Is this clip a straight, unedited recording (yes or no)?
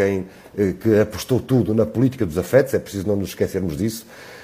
yes